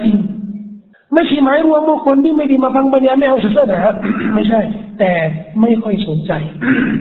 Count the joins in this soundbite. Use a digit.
1